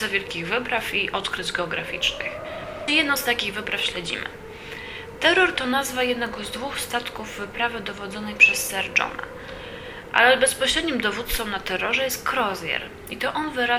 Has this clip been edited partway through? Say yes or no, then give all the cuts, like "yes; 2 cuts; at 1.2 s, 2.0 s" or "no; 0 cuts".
yes; 1 cut; at 2.9 s